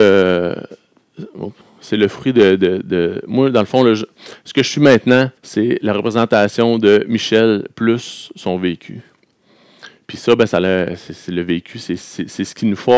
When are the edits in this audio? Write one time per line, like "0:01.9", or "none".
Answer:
0:01.6
0:05.4